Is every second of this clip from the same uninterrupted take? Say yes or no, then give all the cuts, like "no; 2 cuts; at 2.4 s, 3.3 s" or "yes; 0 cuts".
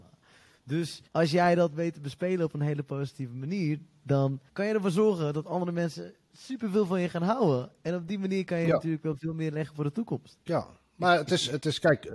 no; 3 cuts; at 1.0 s, 4.5 s, 10.4 s